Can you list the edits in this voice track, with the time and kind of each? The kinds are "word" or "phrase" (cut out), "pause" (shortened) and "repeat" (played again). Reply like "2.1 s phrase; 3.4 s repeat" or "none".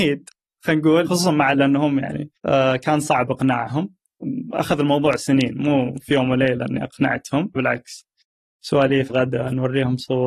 1.1 s word; 1.5 s word; 2.4 s pause; 7.6 s word; 9.1 s word